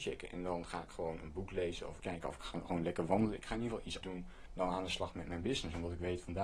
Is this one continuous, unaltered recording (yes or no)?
no